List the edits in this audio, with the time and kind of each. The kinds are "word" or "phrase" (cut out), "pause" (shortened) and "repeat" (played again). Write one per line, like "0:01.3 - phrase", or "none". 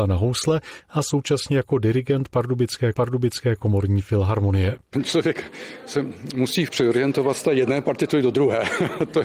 0:02.9 - repeat
0:06.7 - word